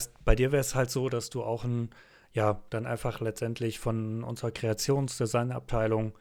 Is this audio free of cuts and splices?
yes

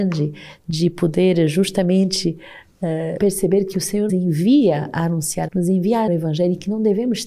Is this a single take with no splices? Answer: no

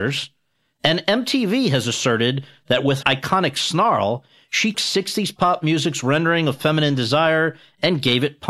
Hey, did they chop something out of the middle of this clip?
yes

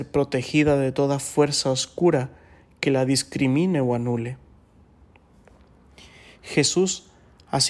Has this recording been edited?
no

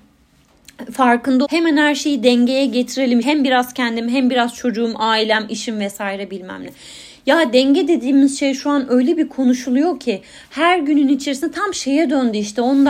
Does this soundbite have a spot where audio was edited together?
yes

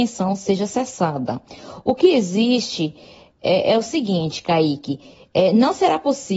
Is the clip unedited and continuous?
yes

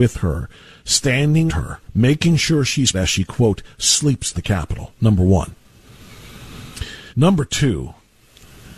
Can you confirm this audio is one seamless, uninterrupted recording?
no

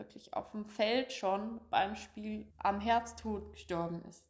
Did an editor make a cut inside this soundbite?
yes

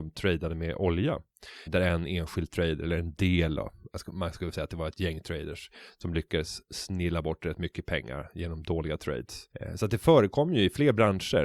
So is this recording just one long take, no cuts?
no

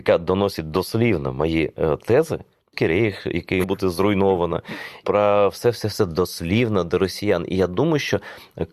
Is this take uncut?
no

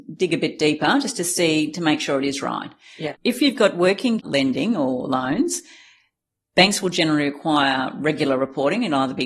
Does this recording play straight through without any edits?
no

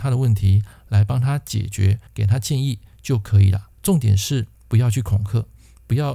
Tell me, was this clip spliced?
yes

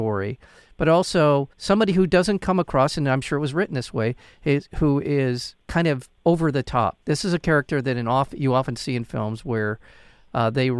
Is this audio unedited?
no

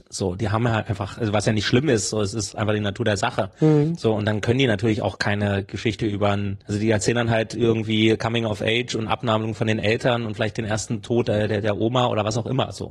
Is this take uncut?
no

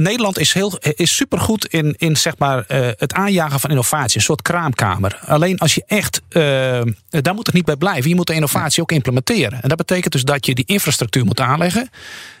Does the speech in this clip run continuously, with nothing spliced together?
yes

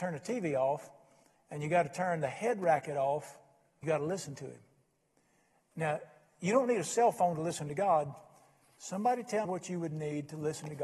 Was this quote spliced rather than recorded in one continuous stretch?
yes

